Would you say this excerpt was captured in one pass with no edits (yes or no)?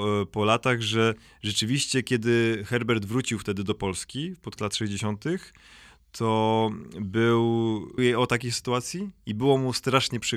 no